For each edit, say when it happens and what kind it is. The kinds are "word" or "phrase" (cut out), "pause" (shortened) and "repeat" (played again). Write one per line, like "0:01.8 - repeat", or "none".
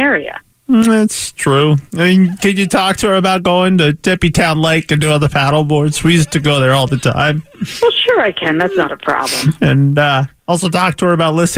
0:02.4 - word